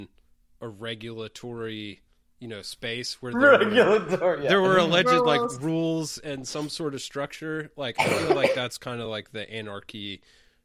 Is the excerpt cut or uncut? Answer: uncut